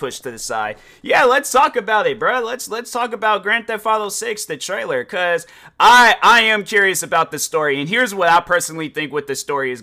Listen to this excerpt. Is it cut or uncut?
uncut